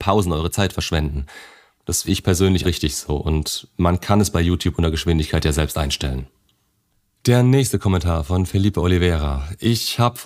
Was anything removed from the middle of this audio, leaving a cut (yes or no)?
yes